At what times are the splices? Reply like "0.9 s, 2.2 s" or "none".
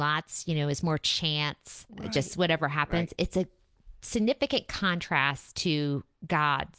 1.9 s